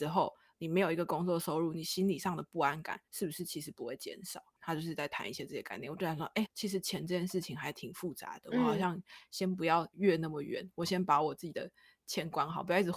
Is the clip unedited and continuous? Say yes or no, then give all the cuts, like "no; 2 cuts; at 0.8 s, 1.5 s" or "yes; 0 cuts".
no; 2 cuts; at 3.1 s, 6.4 s